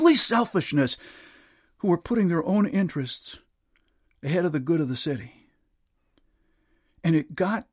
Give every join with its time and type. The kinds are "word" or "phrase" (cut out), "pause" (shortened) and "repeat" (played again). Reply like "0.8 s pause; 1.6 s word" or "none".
none